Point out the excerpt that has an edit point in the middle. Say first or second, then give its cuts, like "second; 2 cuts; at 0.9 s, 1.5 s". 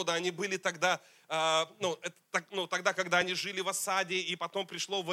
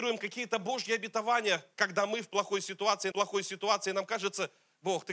second; 1 cut; at 3.1 s